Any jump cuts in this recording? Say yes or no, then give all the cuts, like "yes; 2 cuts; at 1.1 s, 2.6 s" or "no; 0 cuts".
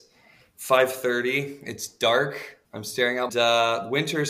yes; 2 cuts; at 2.6 s, 3.3 s